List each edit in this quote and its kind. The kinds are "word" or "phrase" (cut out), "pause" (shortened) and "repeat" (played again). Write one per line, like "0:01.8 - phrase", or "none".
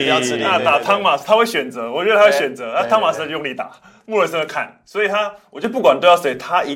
none